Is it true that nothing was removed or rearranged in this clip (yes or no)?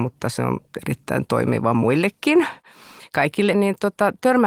no